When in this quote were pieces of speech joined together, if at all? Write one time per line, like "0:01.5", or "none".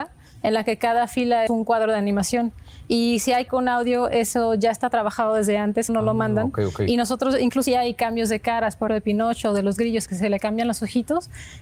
0:01.5
0:03.5
0:05.9
0:07.7
0:08.9
0:10.1